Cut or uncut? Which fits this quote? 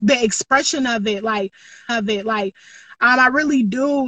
cut